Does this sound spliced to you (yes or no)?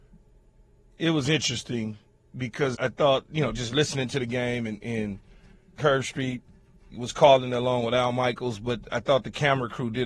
yes